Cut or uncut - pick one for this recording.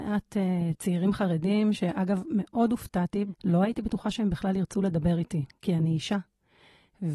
uncut